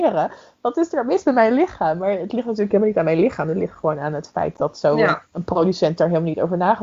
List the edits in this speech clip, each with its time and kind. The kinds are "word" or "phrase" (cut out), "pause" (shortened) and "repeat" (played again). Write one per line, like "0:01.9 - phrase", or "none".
none